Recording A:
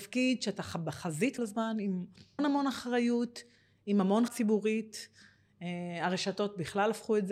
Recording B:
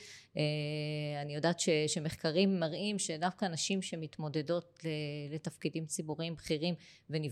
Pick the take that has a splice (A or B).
A